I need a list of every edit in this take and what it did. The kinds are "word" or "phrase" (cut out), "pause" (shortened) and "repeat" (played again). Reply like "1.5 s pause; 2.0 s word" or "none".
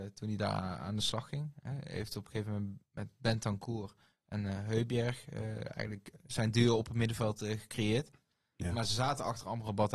none